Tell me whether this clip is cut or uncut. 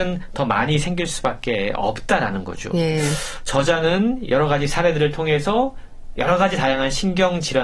uncut